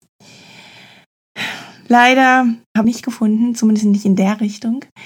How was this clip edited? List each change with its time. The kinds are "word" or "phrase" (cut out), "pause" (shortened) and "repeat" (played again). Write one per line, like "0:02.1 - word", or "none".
0:02.8 - phrase